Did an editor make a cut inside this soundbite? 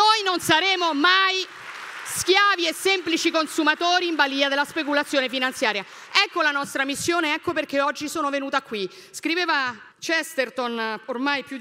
yes; 1 cut; at 9.9 s

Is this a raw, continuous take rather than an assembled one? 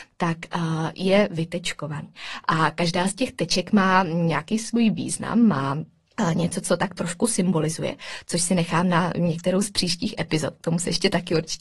yes; 0 cuts

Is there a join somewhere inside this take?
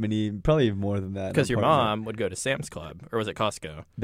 no; 0 cuts

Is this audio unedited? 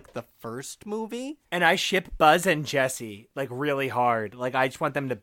no; 1 cut; at 1.4 s

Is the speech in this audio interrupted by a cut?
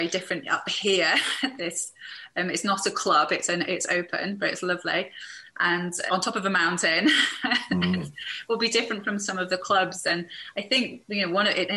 yes; 2 cuts; at 1.6 s, 6.1 s

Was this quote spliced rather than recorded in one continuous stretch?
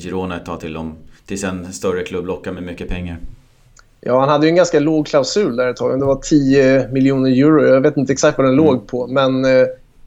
no; 0 cuts

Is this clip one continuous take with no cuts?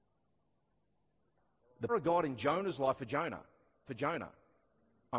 no; 3 cuts; at 1.9 s, 3.0 s, 3.9 s

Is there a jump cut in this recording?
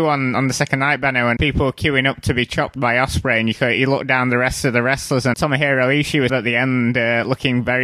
yes; 3 cuts; at 1.4 s, 5.3 s, 6.3 s

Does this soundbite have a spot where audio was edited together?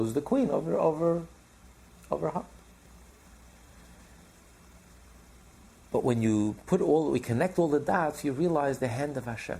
no; 0 cuts

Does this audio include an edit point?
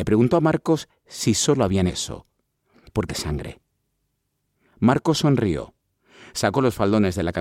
yes; 2 cuts; at 1.9 s, 3.1 s

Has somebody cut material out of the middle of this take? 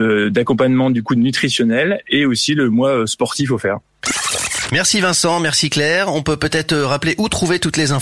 no; 0 cuts

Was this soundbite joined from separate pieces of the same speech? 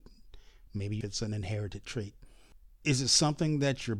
yes; 1 cut; at 1.0 s

